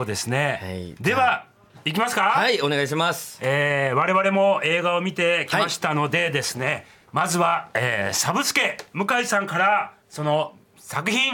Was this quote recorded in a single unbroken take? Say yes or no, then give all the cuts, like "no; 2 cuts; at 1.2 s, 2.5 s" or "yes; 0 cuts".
no; 1 cut; at 10.0 s